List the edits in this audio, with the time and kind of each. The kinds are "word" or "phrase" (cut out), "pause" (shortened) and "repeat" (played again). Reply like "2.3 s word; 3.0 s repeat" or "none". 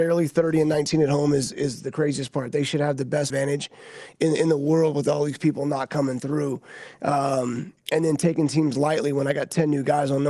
3.3 s phrase; 7.8 s pause